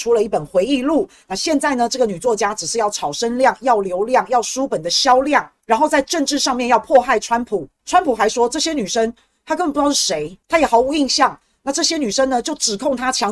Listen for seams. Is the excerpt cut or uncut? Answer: uncut